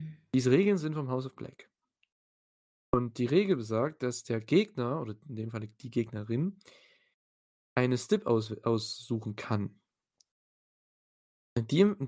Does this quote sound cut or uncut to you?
uncut